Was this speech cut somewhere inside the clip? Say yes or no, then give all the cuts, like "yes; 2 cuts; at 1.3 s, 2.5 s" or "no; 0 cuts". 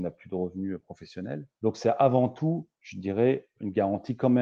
yes; 1 cut; at 1.5 s